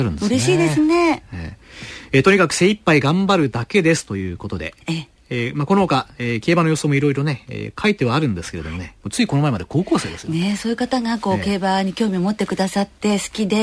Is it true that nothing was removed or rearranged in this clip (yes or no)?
no